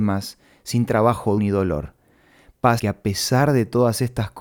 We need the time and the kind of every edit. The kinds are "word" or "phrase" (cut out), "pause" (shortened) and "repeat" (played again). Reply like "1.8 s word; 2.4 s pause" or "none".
1.4 s word; 2.8 s word